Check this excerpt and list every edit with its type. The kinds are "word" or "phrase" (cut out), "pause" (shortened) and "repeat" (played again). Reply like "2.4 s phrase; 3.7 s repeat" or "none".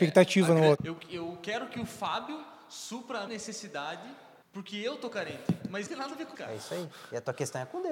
3.3 s word; 5.9 s phrase; 6.3 s word

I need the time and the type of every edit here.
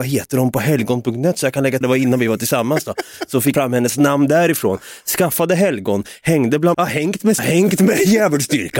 1.8 s phrase; 3.5 s word; 6.7 s word; 7.4 s phrase

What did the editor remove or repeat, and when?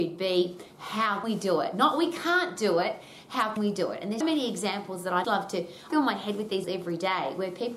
1.2 s word; 3.6 s word; 4.2 s word; 5.2 s word; 5.9 s word; 6.6 s word

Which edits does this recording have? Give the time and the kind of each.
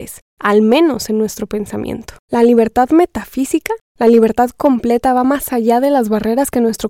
2.2 s pause

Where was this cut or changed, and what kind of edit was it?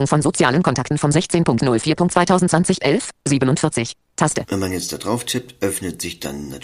none

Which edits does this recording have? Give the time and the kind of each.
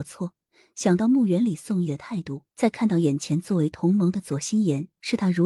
2.5 s pause

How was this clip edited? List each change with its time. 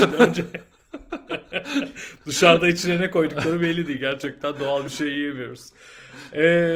none

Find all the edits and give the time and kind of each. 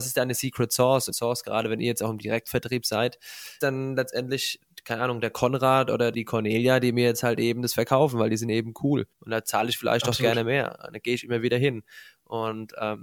1.1 s phrase; 3.6 s word; 6.1 s word; 9.1 s pause

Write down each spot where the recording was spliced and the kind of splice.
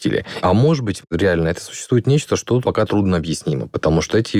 2.6 s word

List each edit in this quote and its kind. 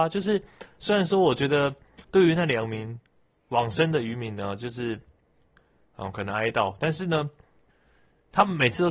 2.0 s pause

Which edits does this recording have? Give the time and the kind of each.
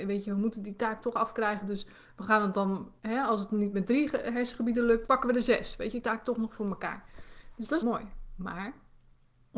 5.1 s word; 6.0 s phrase; 7.8 s word

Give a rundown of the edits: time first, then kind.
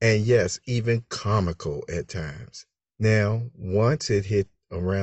2.8 s pause

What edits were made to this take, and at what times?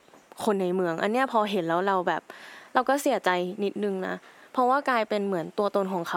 none

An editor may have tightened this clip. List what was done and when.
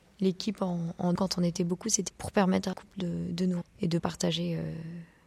1.2 s word; 2.1 s word; 2.7 s word; 3.6 s word; 4.0 s word

